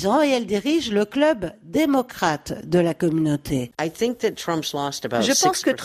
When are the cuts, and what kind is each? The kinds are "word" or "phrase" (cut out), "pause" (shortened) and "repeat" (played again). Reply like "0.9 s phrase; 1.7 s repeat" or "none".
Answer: none